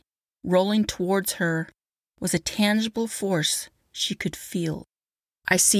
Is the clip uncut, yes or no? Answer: yes